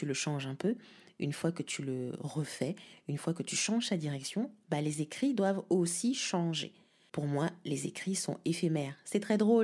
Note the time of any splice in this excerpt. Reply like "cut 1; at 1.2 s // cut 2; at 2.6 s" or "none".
none

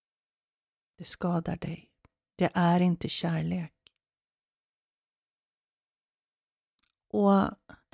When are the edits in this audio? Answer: none

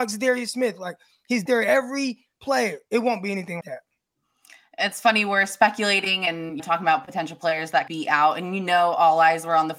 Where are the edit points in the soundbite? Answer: cut 1; at 1.5 s // cut 2; at 3.6 s // cut 3; at 6.6 s // cut 4; at 7.9 s

